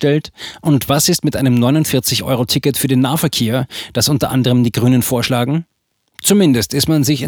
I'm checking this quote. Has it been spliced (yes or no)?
no